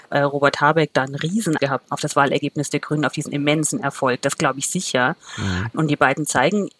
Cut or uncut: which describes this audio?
cut